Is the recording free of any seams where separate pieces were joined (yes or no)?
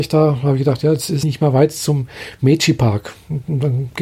no